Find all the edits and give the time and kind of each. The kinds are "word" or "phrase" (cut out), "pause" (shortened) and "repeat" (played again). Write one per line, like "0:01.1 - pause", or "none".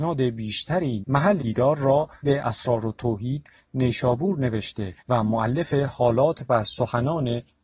0:01.0 - phrase
0:01.4 - word
0:02.2 - word
0:05.0 - pause